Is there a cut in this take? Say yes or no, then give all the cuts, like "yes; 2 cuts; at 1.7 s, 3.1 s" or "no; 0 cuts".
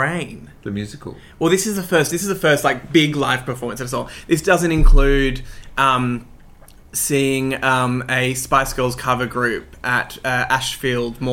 no; 0 cuts